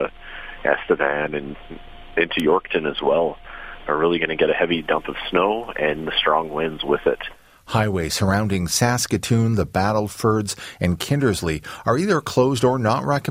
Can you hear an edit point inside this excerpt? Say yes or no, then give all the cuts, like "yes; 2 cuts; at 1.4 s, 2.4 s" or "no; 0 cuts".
no; 0 cuts